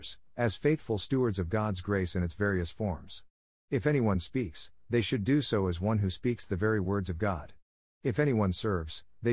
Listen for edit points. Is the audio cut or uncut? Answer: uncut